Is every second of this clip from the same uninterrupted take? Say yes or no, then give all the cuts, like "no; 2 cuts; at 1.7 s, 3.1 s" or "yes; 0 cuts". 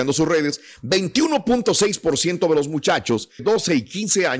no; 1 cut; at 3.4 s